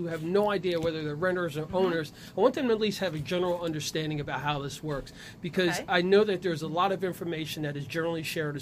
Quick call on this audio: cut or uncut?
uncut